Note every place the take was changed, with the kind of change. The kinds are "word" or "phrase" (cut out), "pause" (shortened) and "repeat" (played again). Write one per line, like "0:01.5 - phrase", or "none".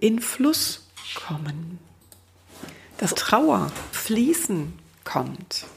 0:03.1 - word
0:03.9 - word